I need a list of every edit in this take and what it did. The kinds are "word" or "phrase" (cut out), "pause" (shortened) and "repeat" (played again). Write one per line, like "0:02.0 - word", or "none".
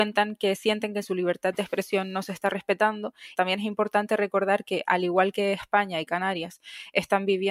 none